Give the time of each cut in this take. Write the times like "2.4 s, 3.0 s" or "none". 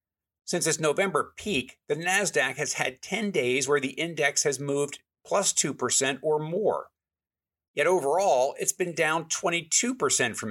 none